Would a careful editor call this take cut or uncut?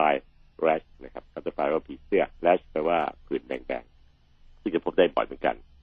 cut